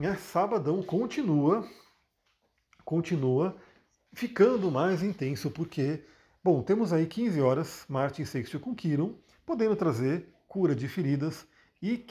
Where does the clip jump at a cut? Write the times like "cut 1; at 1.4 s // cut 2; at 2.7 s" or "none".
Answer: none